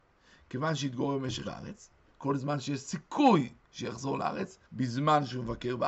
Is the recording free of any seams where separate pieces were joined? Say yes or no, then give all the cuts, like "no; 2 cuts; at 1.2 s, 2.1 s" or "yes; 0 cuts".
no; 3 cuts; at 1.4 s, 2.1 s, 4.6 s